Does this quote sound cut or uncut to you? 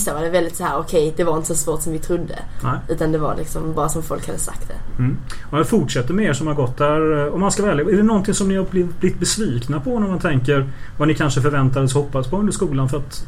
uncut